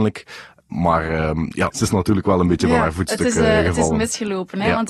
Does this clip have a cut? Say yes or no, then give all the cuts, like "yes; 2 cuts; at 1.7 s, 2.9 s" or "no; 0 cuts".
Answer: yes; 1 cut; at 1.7 s